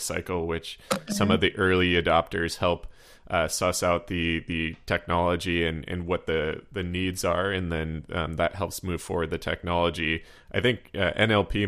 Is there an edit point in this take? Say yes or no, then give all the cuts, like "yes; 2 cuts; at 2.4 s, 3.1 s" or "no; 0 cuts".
no; 0 cuts